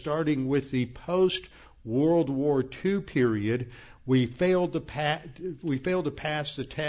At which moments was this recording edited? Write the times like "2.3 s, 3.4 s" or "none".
none